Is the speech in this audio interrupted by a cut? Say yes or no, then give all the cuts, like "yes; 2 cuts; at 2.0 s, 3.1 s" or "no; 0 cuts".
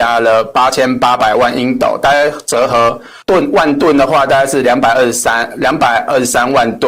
yes; 1 cut; at 3.2 s